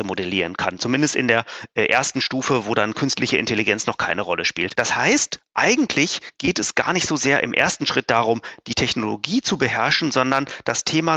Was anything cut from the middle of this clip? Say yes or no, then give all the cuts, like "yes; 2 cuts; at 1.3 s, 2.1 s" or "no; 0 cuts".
no; 0 cuts